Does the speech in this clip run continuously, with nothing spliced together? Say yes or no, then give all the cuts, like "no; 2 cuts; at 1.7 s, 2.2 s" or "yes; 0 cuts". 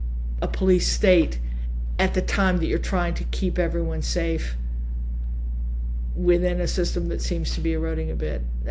yes; 0 cuts